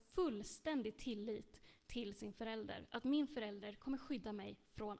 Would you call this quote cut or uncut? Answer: uncut